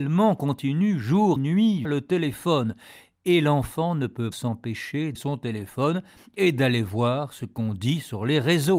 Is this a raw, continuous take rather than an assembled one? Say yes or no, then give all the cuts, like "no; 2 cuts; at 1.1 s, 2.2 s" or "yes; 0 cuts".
no; 4 cuts; at 1.4 s, 1.8 s, 4.3 s, 5.1 s